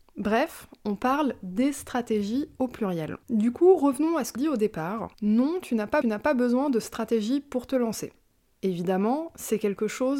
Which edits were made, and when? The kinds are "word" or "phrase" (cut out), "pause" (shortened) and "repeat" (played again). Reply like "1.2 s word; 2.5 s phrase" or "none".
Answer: 3.2 s pause; 4.4 s word; 5.1 s pause; 6.0 s repeat